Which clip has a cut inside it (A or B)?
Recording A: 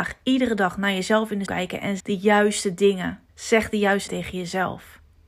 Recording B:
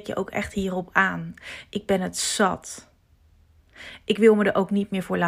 A